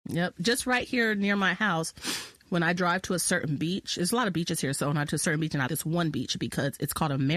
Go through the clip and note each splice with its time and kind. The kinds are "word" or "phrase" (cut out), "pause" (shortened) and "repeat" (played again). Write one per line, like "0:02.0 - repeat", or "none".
0:05.1 - word
0:05.7 - word